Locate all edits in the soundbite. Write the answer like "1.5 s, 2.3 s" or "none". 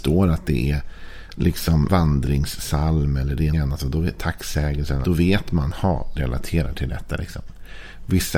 1.9 s, 3.5 s, 5.0 s, 6.2 s

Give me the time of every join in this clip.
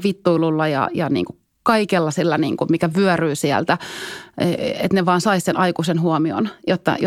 none

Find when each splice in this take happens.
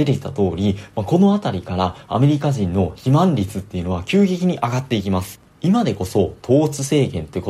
5.5 s

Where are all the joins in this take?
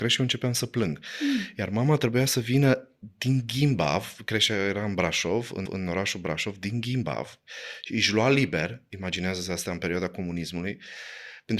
5.7 s

